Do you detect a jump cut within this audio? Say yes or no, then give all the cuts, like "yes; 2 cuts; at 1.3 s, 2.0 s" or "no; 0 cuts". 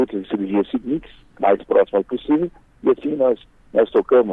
no; 0 cuts